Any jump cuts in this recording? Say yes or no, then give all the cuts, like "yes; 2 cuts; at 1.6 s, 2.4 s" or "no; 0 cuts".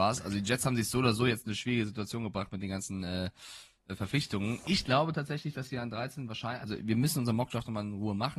no; 0 cuts